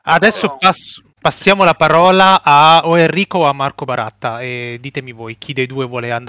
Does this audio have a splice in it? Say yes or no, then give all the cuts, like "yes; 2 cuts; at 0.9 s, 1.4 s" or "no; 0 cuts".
yes; 1 cut; at 1.1 s